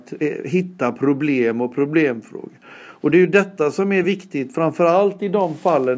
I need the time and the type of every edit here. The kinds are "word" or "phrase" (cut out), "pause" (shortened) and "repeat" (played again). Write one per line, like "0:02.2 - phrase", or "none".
none